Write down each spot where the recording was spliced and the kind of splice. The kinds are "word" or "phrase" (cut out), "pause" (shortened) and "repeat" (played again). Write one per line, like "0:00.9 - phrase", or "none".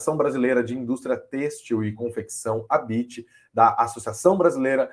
none

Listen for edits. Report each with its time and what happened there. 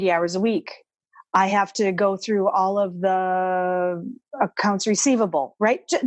none

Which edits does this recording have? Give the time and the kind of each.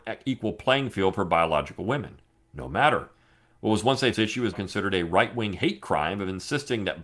0:04.1 - word
0:04.5 - word

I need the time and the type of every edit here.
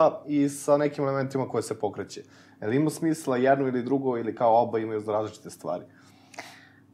none

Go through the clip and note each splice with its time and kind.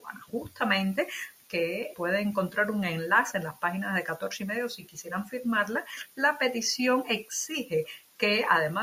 0:01.4 - phrase
0:01.9 - word

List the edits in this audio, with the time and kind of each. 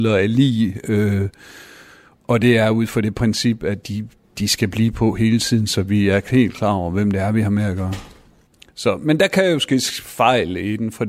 none

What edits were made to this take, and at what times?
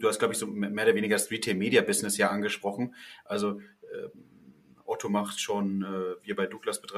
none

